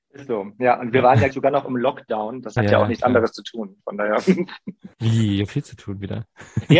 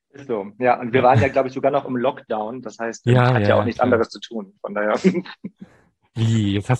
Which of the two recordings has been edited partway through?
first; 4 cuts; at 1.3 s, 2.6 s, 4.9 s, 5.5 s

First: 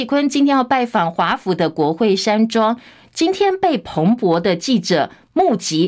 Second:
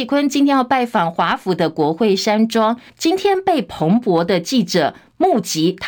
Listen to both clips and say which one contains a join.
second; 1 cut; at 2.9 s

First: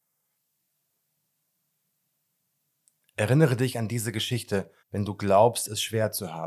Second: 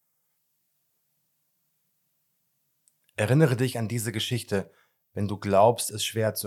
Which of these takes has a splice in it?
first; 1 cut; at 4.8 s

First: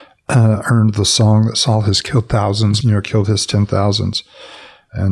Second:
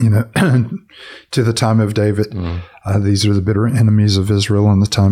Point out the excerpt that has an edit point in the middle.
first; 1 cut; at 2.8 s

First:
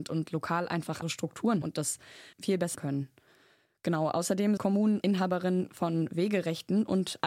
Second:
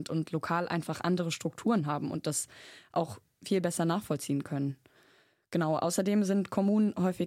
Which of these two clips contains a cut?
first; 6 cuts; at 1.0 s, 1.6 s, 2.3 s, 2.7 s, 4.6 s, 5.0 s

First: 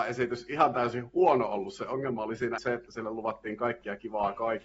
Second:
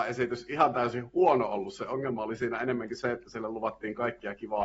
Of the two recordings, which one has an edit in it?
first; 1 cut; at 2.6 s

